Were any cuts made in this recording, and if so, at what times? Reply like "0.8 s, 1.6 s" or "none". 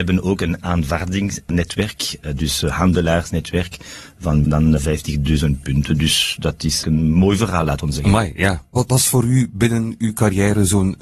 4.4 s, 4.8 s, 6.8 s